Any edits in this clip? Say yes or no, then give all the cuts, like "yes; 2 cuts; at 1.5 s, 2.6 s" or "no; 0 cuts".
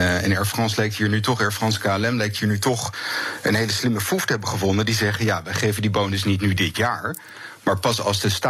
no; 0 cuts